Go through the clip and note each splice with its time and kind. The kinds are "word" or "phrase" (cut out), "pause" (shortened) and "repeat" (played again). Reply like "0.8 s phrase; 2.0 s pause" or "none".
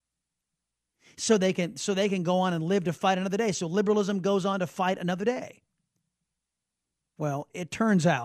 none

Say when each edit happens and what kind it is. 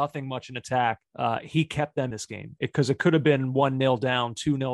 1.1 s pause; 2.1 s word

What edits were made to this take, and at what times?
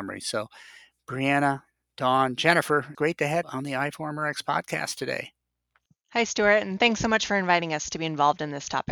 2.9 s word; 3.4 s word

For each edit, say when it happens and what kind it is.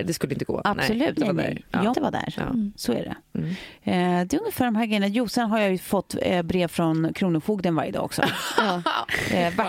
1.2 s word; 1.9 s word

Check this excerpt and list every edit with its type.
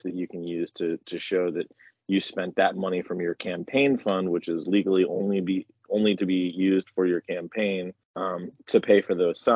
none

